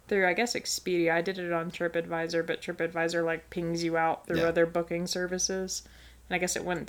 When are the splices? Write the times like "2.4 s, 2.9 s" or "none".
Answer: none